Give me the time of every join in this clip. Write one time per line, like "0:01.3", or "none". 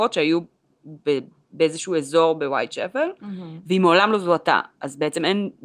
0:01.0